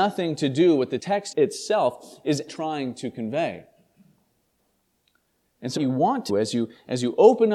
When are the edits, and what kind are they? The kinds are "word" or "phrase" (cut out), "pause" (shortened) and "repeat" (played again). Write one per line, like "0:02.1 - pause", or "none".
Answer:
0:01.0 - word
0:01.3 - word
0:02.5 - word
0:05.8 - word
0:06.3 - word